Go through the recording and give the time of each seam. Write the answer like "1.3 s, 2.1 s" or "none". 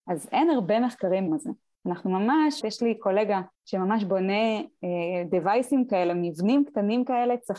1.3 s, 2.6 s, 3.5 s